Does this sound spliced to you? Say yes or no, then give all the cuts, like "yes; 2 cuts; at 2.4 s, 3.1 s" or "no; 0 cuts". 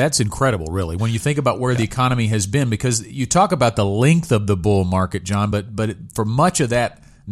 no; 0 cuts